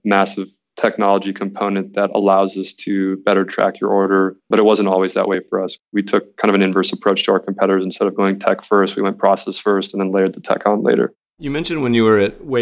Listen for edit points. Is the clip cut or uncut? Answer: cut